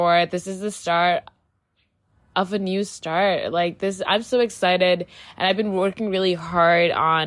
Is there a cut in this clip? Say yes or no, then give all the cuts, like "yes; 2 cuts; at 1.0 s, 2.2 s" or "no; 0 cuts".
no; 0 cuts